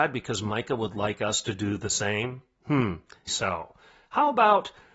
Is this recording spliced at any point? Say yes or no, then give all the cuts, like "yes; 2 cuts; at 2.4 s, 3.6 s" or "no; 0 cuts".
yes; 1 cut; at 3.3 s